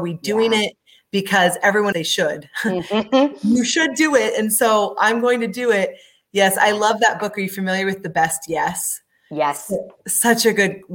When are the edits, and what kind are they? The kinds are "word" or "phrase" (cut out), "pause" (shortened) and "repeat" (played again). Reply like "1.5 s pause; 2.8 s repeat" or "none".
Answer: 1.9 s phrase